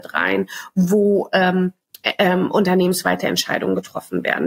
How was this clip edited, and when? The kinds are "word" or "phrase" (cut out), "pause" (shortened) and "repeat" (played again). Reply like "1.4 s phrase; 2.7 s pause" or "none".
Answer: none